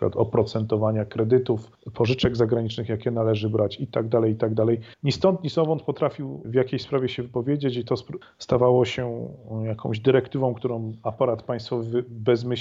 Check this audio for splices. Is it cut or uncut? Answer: cut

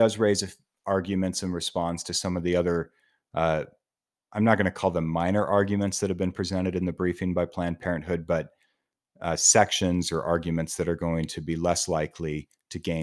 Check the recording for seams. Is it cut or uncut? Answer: uncut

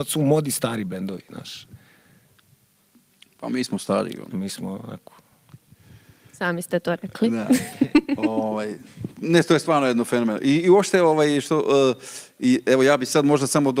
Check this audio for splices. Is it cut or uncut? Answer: uncut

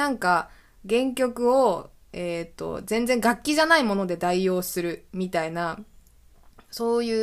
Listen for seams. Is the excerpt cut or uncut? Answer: uncut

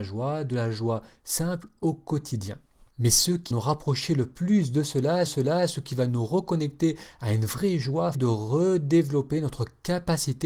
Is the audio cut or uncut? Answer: cut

